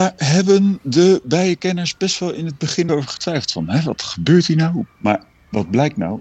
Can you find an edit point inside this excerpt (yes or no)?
yes